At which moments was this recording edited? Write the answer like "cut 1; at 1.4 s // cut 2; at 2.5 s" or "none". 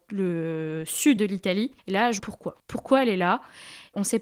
cut 1; at 1.2 s // cut 2; at 2.2 s // cut 3; at 2.6 s